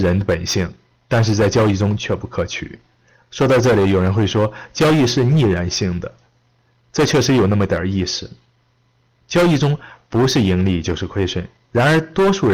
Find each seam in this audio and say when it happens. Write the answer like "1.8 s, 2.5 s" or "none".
none